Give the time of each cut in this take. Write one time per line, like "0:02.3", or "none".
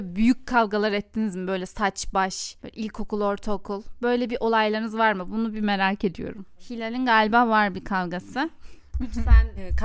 none